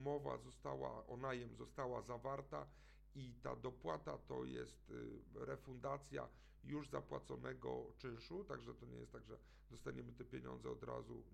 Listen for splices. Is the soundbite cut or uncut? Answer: uncut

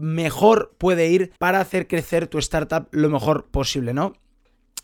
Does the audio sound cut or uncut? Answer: cut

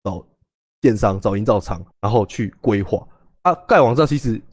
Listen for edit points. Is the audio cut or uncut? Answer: cut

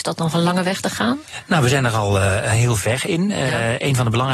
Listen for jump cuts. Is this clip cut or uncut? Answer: uncut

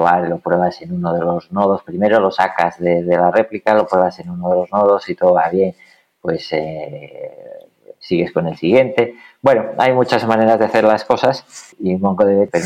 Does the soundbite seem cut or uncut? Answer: uncut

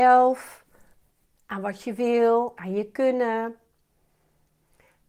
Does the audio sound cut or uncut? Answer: uncut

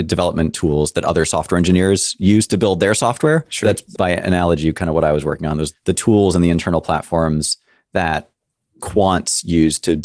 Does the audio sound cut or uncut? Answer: uncut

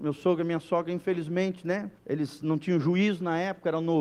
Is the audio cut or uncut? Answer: cut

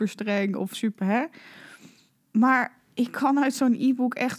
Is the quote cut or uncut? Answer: cut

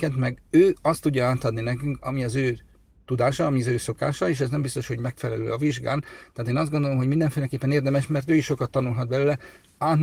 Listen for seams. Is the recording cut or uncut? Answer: uncut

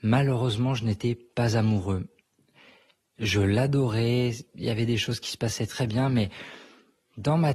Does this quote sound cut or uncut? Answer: cut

